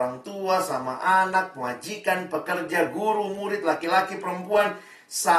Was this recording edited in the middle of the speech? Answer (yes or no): no